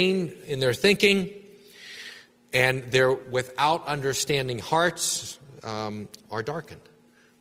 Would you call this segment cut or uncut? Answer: uncut